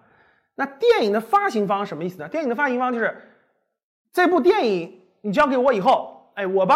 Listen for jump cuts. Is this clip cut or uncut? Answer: uncut